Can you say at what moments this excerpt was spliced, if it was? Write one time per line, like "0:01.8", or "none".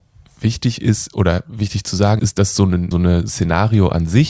0:01.1
0:02.2
0:02.9
0:03.3